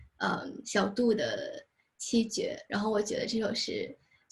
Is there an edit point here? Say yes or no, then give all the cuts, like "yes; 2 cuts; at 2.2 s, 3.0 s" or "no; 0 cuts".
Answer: no; 0 cuts